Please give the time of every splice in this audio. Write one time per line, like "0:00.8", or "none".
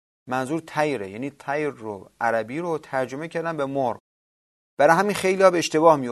none